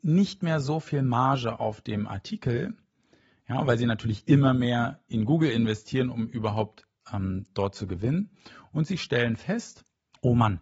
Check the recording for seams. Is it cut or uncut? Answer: uncut